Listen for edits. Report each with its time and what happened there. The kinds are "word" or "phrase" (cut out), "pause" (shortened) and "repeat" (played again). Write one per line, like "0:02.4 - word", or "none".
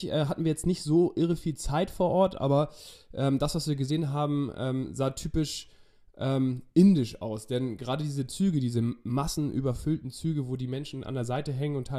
none

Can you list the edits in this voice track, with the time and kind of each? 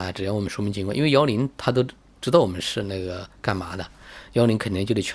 none

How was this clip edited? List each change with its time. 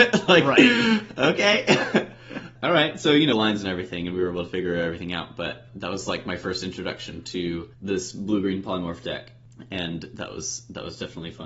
0:03.3 - phrase
0:07.7 - pause

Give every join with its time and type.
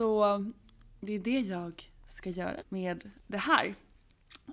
0:02.6 - word
0:03.2 - pause

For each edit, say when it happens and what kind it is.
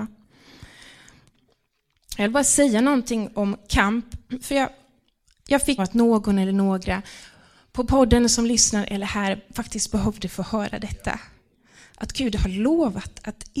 0:05.8 - phrase

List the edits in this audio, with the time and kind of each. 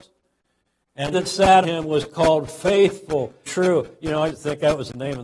0:01.1 - word
0:01.6 - word
0:03.5 - word
0:04.3 - word

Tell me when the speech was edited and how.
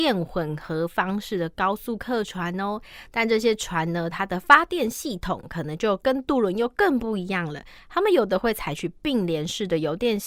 0:04.1 - phrase

